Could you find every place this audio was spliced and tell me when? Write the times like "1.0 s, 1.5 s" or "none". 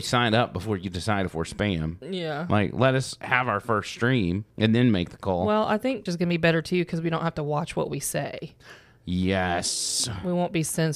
4.5 s, 6.1 s